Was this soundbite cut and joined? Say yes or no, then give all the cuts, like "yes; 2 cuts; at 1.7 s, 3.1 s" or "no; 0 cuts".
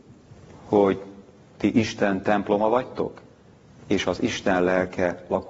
no; 0 cuts